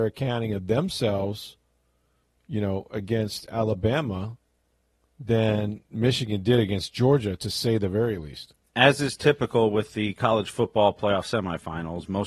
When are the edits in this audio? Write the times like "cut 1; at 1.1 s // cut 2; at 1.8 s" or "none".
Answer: none

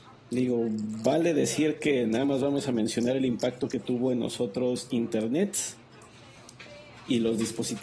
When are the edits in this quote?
none

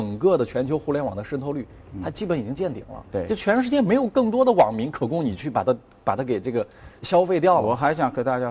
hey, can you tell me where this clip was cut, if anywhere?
cut 1; at 7.0 s

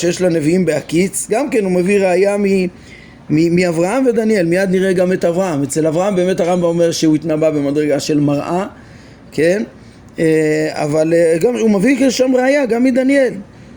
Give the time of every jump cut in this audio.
none

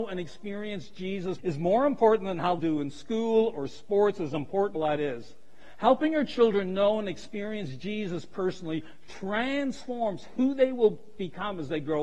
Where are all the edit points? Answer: cut 1; at 1.4 s // cut 2; at 2.6 s // cut 3; at 4.7 s

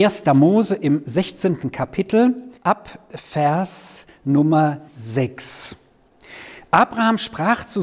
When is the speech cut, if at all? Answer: cut 1; at 2.6 s // cut 2; at 4.9 s

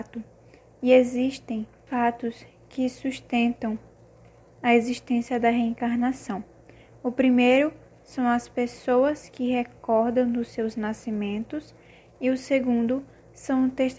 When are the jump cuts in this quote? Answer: cut 1; at 1.9 s

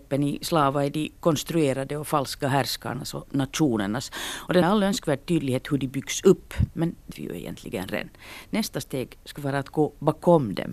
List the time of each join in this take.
cut 1; at 2.4 s // cut 2; at 4.6 s // cut 3; at 7.1 s

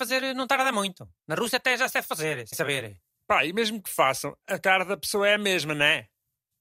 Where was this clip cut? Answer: cut 1; at 1.2 s // cut 2; at 2.5 s // cut 3; at 3.2 s

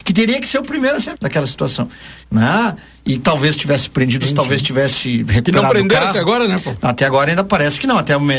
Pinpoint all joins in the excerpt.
cut 1; at 1.1 s // cut 2; at 2.2 s // cut 3; at 3.2 s // cut 4; at 4.2 s

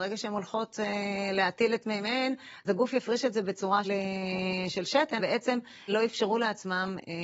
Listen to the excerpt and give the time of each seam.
cut 1; at 2.6 s // cut 2; at 3.8 s // cut 3; at 5.2 s // cut 4; at 5.9 s

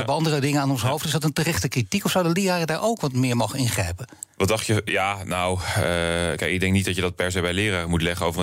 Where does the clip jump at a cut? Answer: none

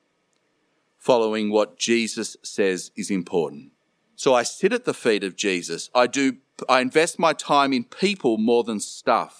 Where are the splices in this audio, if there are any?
cut 1; at 3.8 s

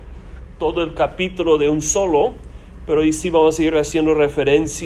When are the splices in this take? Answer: none

